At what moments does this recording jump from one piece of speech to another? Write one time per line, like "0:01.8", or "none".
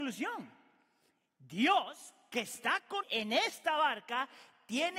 0:03.0